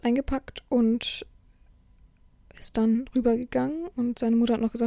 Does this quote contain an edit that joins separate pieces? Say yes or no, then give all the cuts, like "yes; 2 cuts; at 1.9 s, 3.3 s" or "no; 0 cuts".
no; 0 cuts